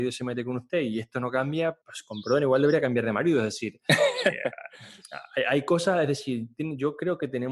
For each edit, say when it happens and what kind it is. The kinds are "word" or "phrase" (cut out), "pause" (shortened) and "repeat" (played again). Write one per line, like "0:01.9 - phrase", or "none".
0:01.8 - pause

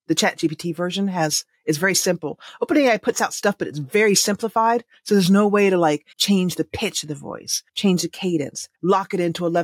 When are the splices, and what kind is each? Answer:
0:06.1 - pause
0:07.7 - pause
0:08.7 - pause

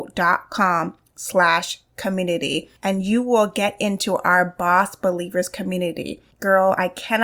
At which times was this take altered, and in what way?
0:02.8 - pause
0:06.3 - pause

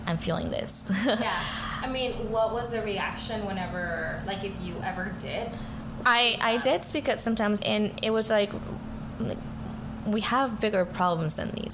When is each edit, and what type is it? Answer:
0:07.6 - word

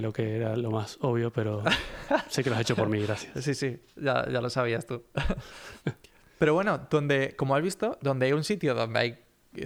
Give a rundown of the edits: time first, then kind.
none

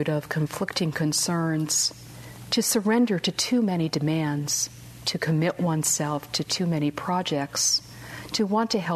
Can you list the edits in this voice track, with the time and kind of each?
none

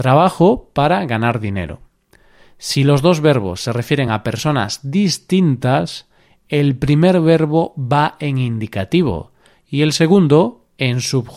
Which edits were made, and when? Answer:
none

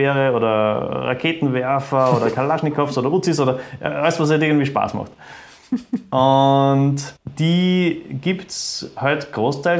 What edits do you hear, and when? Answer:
0:07.2 - pause

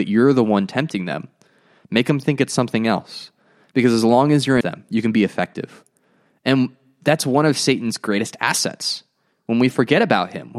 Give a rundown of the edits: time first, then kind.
0:04.6 - phrase

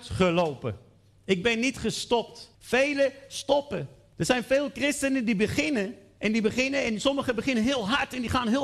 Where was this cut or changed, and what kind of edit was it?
none

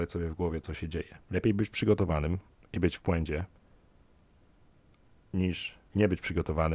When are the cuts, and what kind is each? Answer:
0:01.2 - pause
0:02.6 - pause
0:05.9 - pause

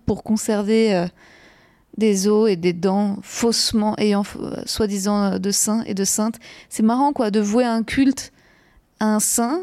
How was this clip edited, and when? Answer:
none

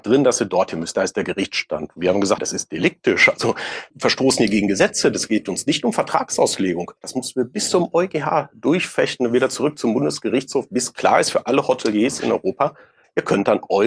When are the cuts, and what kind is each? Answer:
0:02.4 - word
0:03.9 - word
0:07.0 - pause

